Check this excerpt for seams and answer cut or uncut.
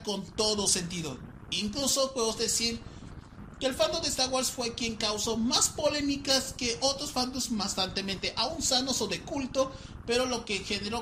uncut